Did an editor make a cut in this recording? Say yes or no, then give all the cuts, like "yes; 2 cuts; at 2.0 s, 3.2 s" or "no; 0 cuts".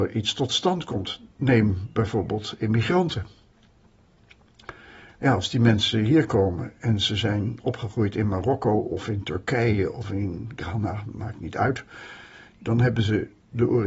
no; 0 cuts